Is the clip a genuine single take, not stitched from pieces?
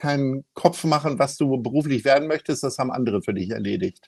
yes; 0 cuts

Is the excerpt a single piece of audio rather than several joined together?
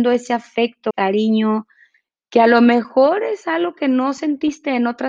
no; 1 cut; at 0.9 s

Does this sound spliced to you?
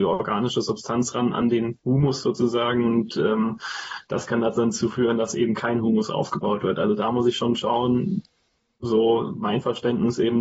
no; 0 cuts

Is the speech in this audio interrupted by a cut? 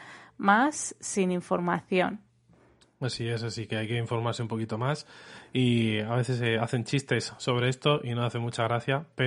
no; 0 cuts

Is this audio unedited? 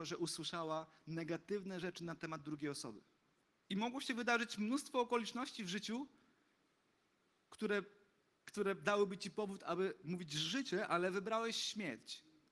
no; 1 cut; at 3.4 s

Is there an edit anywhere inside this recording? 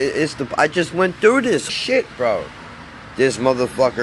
yes; 1 cut; at 1.7 s

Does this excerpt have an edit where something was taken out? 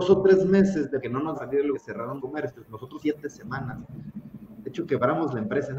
yes; 5 cuts; at 1.0 s, 1.3 s, 1.7 s, 2.2 s, 3.0 s

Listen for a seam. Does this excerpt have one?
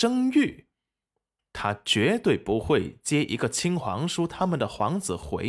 no; 0 cuts

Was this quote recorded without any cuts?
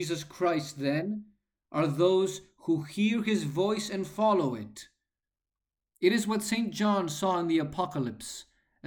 yes; 0 cuts

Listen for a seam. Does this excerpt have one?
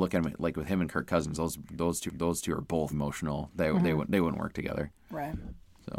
yes; 2 cuts; at 2.1 s, 2.9 s

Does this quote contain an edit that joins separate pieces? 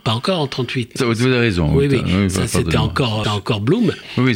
yes; 2 cuts; at 1.0 s, 3.2 s

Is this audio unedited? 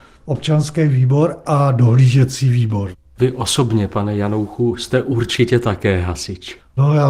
yes; 0 cuts

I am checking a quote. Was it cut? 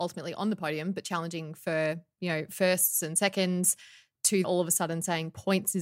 yes; 1 cut; at 4.4 s

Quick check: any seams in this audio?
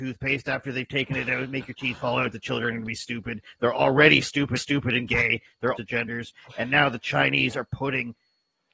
yes; 2 cuts; at 4.6 s, 5.8 s

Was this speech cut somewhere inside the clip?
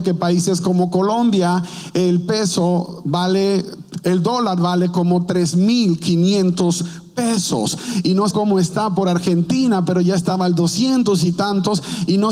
yes; 1 cut; at 8.3 s

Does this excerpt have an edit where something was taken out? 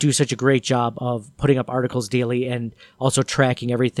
no; 0 cuts

